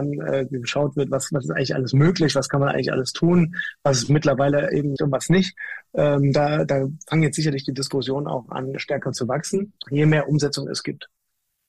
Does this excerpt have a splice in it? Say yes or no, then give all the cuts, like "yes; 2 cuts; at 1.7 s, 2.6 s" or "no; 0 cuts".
yes; 3 cuts; at 5.0 s, 8.8 s, 9.8 s